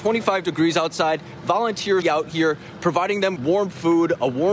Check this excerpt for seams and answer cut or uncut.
cut